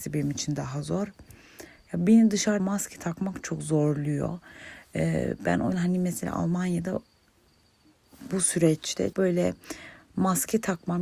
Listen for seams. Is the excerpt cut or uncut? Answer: cut